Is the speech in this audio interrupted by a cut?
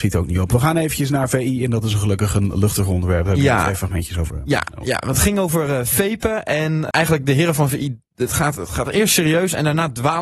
yes; 1 cut; at 6.9 s

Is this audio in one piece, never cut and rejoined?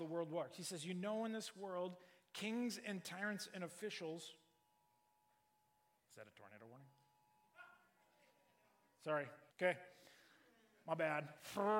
no; 1 cut; at 9.5 s

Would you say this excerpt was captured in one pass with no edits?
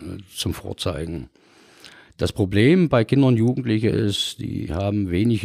yes; 0 cuts

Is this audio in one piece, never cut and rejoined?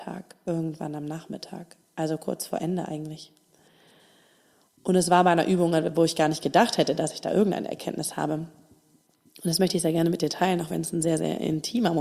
yes; 0 cuts

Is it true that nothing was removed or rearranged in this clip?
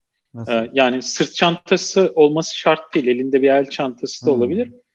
yes; 0 cuts

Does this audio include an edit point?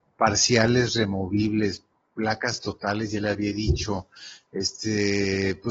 no; 0 cuts

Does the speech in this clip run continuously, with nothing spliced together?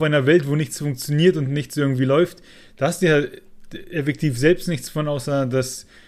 yes; 0 cuts

